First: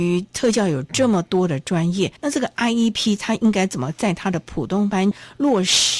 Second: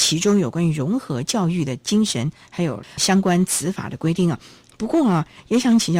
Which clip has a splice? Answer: first; 1 cut; at 2.2 s

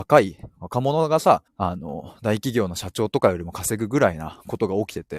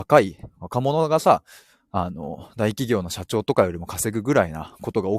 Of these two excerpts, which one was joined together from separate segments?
first; 1 cut; at 1.5 s

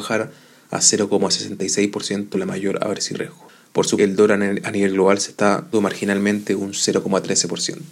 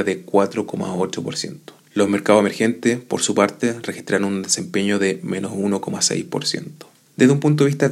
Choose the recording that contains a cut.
first; 4 cuts; at 2.3 s, 3.1 s, 4.0 s, 5.7 s

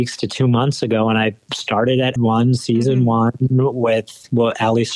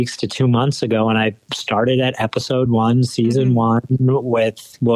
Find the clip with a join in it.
first; 1 cut; at 2.2 s

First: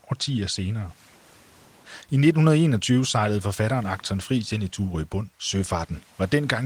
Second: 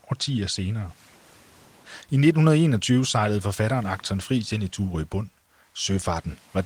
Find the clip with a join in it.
first; 1 cut; at 5.3 s

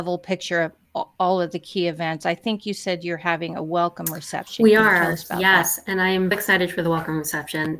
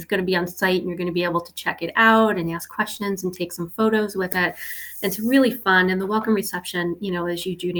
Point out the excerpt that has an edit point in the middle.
first; 1 cut; at 6.3 s

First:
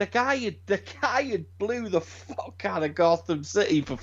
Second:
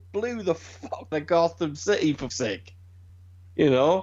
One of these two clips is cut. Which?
second; 3 cuts; at 1.1 s, 2.3 s, 3.1 s

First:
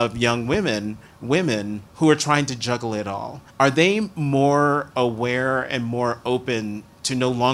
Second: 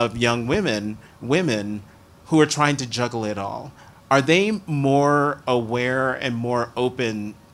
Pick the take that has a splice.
first; 2 cuts; at 1.9 s, 3.5 s

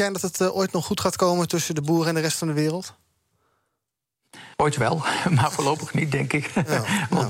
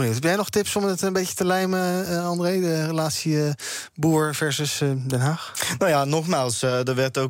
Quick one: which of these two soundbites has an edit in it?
first; 1 cut; at 4.5 s

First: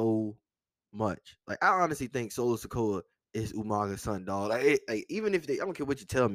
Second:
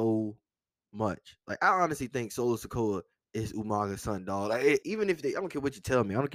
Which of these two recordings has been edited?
second; 1 cut; at 4.8 s

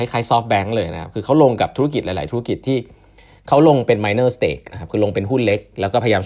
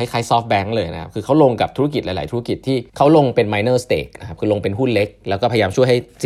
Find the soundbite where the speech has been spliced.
second; 1 cut; at 2.9 s

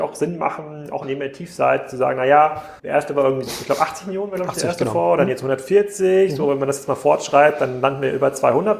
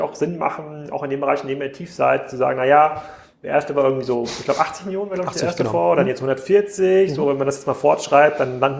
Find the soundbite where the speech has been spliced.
first; 3 cuts; at 1.0 s, 2.8 s, 3.5 s

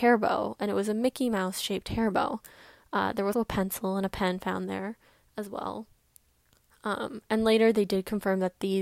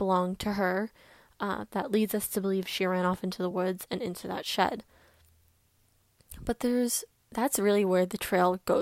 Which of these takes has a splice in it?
first; 1 cut; at 3.3 s

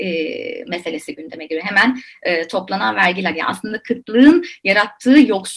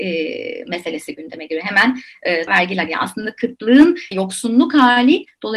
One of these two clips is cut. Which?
second; 2 cuts; at 2.5 s, 4.1 s

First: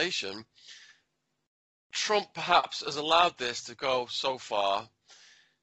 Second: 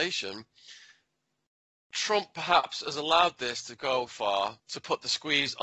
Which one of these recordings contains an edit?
second; 2 cuts; at 4.1 s, 4.6 s

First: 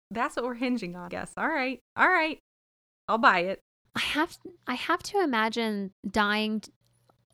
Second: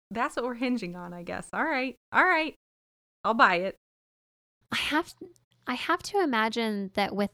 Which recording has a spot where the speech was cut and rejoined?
first; 4 cuts; at 1.1 s, 3.7 s, 4.6 s, 5.9 s

